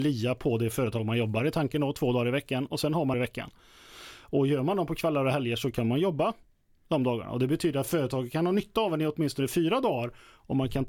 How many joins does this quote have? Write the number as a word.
one